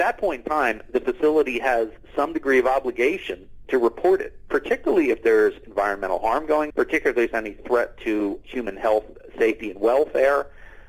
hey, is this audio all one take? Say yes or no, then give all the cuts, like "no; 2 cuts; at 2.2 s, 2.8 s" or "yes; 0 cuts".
no; 3 cuts; at 3.6 s, 6.7 s, 8.4 s